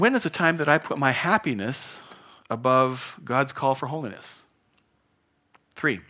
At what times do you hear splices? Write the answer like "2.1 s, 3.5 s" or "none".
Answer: none